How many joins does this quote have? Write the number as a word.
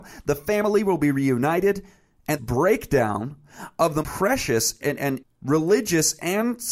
four